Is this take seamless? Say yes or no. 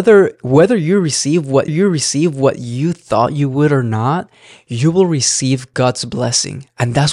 no